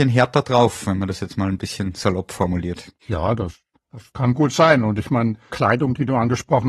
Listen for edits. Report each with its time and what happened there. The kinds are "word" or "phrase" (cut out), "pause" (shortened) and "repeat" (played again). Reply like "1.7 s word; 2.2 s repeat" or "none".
3.0 s pause; 4.1 s pause; 5.5 s word